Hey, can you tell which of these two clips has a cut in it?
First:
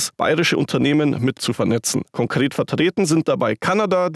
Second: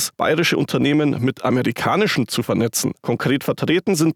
first; 1 cut; at 1.4 s

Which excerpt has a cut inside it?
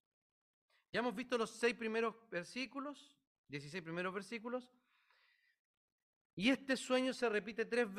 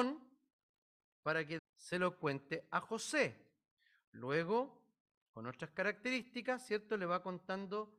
second; 2 cuts; at 1.6 s, 3.8 s

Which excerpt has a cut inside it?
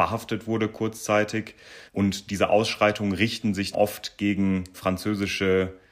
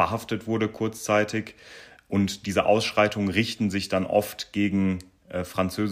first; 3 cuts; at 1.9 s, 3.7 s, 4.7 s

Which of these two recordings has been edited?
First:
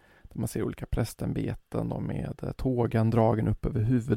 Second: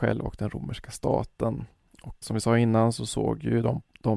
second; 1 cut; at 2.2 s

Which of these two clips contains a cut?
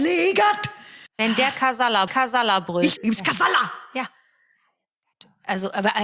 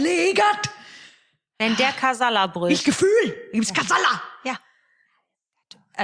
first; 3 cuts; at 1.1 s, 2.1 s, 3.0 s

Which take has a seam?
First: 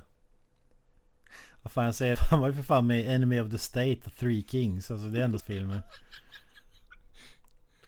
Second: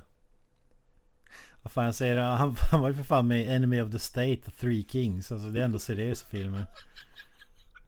first; 2 cuts; at 2.1 s, 5.4 s

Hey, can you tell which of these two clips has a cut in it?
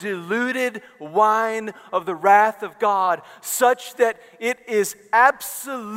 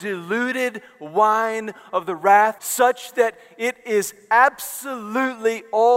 second; 1 cut; at 2.6 s

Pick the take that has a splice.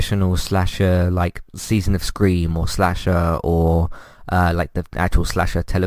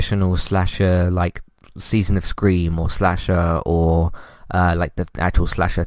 first; 1 cut; at 1.5 s

